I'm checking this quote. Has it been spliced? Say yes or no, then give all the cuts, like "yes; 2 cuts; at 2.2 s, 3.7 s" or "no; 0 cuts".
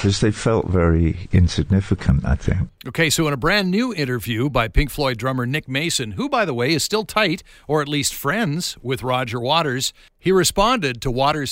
no; 0 cuts